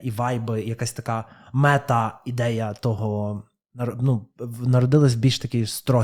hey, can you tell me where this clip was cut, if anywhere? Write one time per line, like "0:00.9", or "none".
none